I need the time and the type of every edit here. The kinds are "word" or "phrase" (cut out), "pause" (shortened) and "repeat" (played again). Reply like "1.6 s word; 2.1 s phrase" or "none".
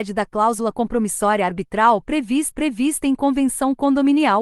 2.5 s repeat